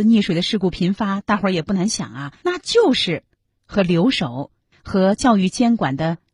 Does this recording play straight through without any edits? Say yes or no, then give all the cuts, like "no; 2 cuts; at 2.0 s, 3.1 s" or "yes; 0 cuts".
no; 1 cut; at 2.4 s